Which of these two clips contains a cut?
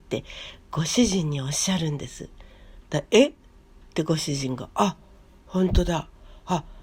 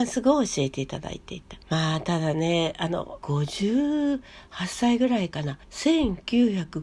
second; 2 cuts; at 1.6 s, 5.6 s

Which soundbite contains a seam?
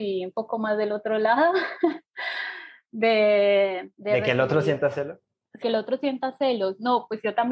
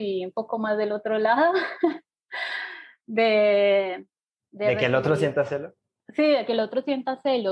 first; 3 cuts; at 2.1 s, 3.9 s, 5.6 s

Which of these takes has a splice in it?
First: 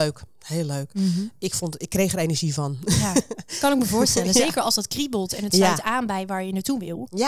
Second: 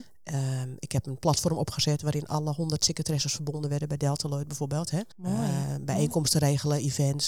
second; 1 cut; at 5.1 s

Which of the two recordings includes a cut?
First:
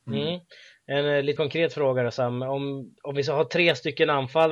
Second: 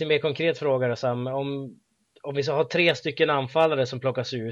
first; 2 cuts; at 1.4 s, 3.0 s

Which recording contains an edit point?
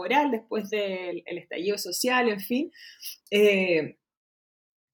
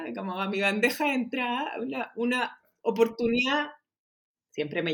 first; 1 cut; at 3.2 s

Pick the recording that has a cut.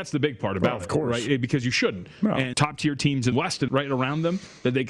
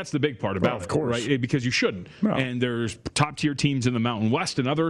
first; 3 cuts; at 2.5 s, 3.3 s, 3.7 s

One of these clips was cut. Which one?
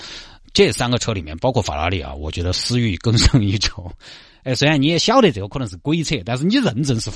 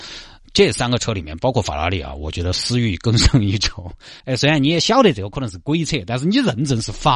second; 1 cut; at 4.2 s

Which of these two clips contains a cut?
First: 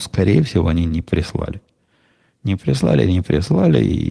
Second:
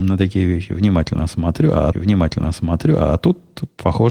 second; 1 cut; at 1.9 s

